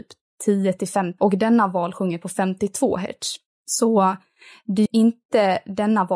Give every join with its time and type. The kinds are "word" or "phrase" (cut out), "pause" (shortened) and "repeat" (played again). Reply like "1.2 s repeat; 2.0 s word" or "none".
1.2 s word; 4.9 s word